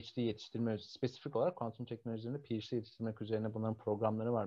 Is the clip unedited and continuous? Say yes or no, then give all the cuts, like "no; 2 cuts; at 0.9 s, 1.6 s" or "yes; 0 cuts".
yes; 0 cuts